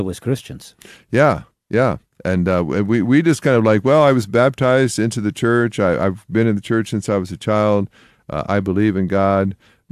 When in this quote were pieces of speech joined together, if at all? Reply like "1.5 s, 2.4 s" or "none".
none